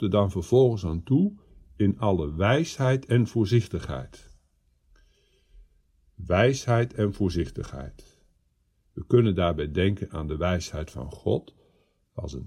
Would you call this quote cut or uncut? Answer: uncut